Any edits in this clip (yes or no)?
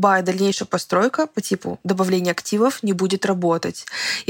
no